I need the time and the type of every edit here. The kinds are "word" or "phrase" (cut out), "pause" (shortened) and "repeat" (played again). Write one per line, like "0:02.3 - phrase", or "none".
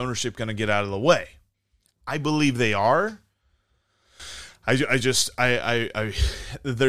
none

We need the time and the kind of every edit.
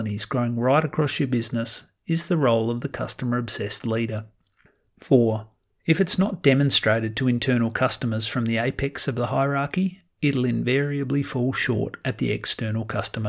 none

